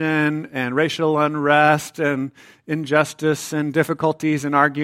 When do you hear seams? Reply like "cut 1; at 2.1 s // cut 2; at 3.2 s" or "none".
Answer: none